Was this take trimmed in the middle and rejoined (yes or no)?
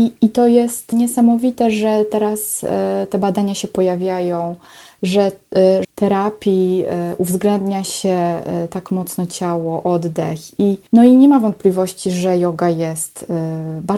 yes